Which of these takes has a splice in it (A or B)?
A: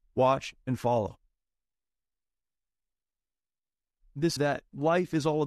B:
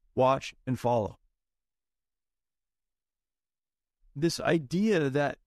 A